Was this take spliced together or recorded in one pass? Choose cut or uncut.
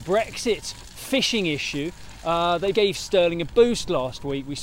cut